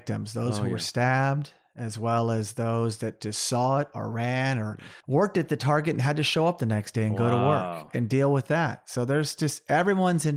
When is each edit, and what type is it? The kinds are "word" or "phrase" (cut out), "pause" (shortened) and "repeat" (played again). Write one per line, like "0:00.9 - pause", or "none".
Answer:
0:05.0 - pause